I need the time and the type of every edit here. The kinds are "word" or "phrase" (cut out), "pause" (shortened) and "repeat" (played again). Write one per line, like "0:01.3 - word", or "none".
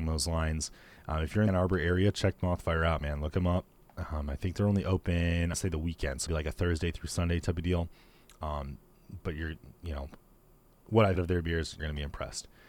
0:01.5 - word
0:05.5 - word
0:06.3 - word
0:11.2 - word
0:11.8 - word